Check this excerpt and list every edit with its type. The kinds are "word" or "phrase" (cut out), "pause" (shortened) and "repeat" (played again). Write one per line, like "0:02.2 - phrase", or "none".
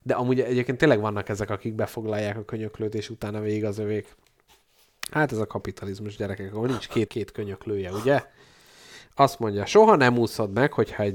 0:07.1 - word

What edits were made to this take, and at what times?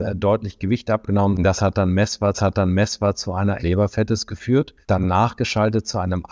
0:02.3 - repeat
0:03.6 - phrase
0:04.8 - pause

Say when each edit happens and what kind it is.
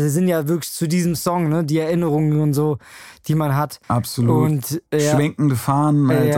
0:03.8 - pause
0:04.9 - pause

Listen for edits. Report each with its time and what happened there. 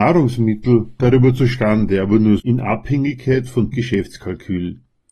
0:01.0 - word
0:02.4 - word
0:03.7 - word

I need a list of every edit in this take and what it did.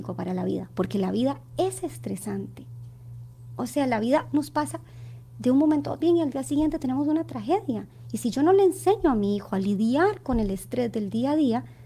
0:06.0 - word

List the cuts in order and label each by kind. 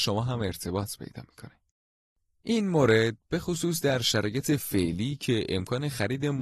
none

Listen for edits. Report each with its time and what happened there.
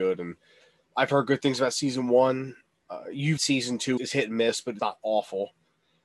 0:03.4 - word
0:04.0 - word
0:04.8 - word

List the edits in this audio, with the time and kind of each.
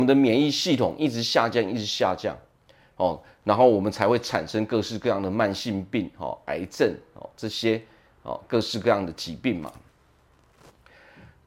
none

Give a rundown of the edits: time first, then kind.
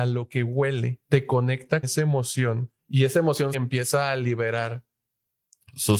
0:01.0 - pause
0:01.8 - word
0:02.8 - pause
0:03.5 - phrase

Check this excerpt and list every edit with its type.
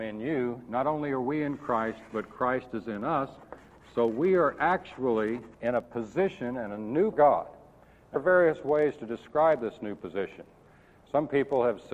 0:05.5 - pause
0:07.1 - phrase
0:08.2 - word

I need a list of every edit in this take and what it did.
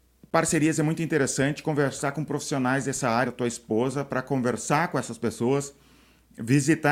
0:03.3 - word

